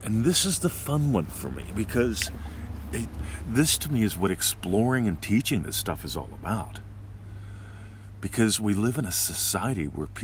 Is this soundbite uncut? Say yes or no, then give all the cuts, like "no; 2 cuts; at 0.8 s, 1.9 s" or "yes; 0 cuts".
no; 1 cut; at 3.4 s